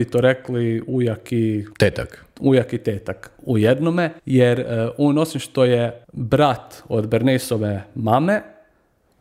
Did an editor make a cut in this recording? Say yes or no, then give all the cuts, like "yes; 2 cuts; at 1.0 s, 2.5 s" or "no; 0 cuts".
yes; 3 cuts; at 1.7 s, 4.2 s, 6.0 s